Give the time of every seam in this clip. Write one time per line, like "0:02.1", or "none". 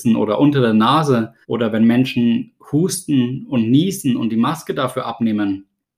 0:01.4

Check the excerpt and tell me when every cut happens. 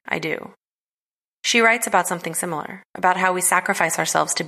none

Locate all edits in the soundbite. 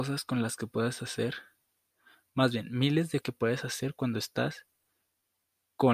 0:03.2

